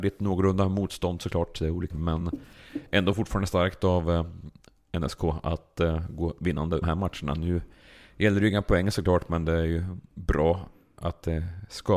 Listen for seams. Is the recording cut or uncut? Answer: cut